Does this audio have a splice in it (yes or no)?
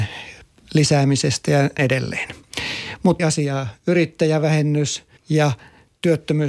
yes